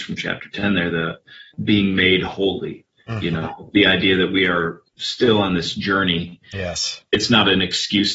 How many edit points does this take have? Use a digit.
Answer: 4